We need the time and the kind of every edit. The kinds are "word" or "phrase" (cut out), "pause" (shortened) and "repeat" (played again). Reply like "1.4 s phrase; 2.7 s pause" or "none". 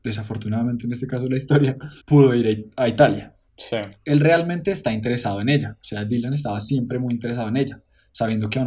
2.0 s pause; 3.5 s pause